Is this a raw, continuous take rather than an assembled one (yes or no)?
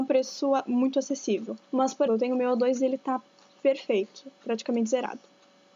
no